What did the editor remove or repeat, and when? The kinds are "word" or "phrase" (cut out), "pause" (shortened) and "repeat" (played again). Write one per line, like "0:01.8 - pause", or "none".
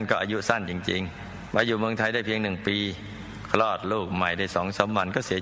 0:01.5 - word